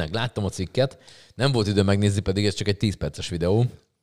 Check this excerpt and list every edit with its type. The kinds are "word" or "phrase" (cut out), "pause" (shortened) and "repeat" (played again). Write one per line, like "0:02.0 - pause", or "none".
none